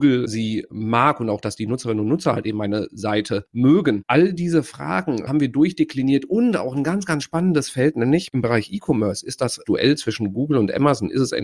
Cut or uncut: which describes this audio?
uncut